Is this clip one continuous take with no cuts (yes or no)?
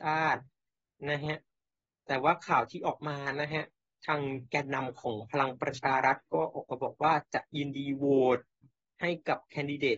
yes